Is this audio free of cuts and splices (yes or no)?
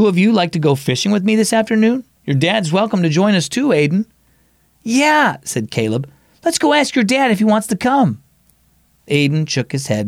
yes